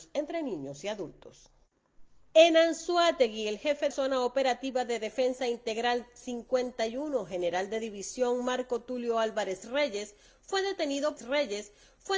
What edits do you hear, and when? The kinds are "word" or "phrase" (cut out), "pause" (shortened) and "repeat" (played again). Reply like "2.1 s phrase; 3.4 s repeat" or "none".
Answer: 3.9 s word; 11.2 s repeat